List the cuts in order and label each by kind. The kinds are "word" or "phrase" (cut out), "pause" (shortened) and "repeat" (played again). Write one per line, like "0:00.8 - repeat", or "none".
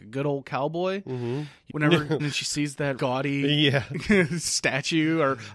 0:01.7 - word
0:02.2 - phrase
0:03.0 - word